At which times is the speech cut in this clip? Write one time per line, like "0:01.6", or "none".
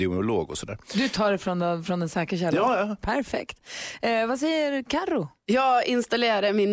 none